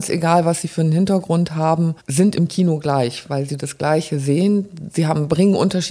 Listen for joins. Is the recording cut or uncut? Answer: cut